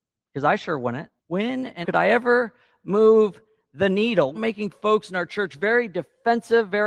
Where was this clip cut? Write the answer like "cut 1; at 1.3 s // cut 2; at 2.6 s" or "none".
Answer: cut 1; at 1.2 s // cut 2; at 1.8 s // cut 3; at 4.3 s